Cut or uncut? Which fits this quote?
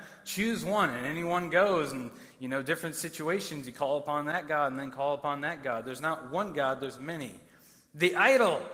uncut